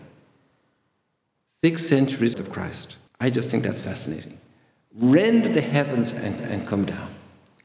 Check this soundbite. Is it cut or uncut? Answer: cut